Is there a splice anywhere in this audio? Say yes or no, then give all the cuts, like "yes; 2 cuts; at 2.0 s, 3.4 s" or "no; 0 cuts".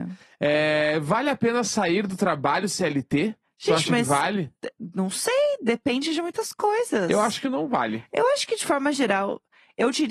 yes; 2 cuts; at 3.4 s, 4.6 s